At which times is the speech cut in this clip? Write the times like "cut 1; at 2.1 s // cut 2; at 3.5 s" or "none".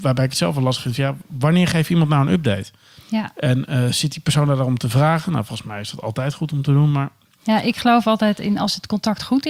none